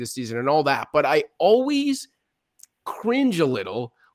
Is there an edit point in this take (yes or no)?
no